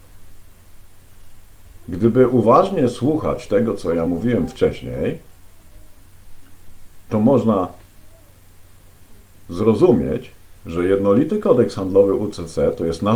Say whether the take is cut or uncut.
uncut